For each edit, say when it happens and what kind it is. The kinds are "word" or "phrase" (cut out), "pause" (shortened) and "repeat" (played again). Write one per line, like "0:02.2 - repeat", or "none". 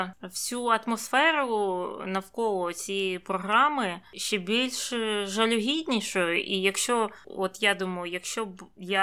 none